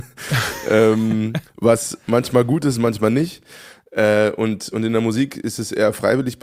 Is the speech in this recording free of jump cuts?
yes; 0 cuts

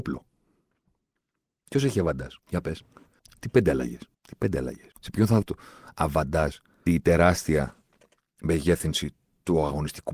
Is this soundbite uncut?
no; 6 cuts; at 2.4 s, 3.2 s, 4.1 s, 4.9 s, 5.4 s, 6.9 s

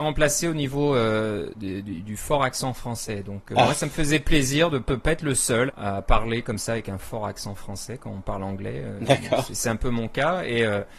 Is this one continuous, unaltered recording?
no; 3 cuts; at 1.5 s, 4.9 s, 5.7 s

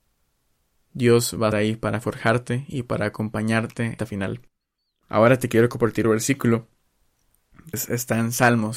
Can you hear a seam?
yes; 4 cuts; at 1.5 s, 4.0 s, 6.0 s, 7.7 s

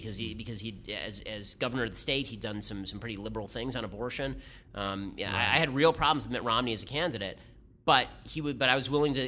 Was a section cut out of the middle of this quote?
no; 0 cuts

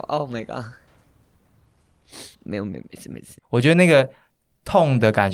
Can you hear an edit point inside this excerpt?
yes; 2 cuts; at 2.3 s, 3.4 s

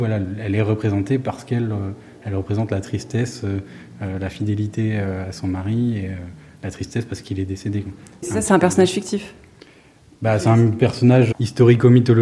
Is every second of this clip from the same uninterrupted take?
yes; 0 cuts

